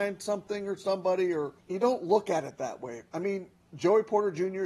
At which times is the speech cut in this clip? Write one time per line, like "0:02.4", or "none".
0:01.6